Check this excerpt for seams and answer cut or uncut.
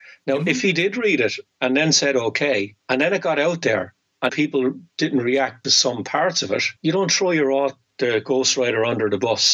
cut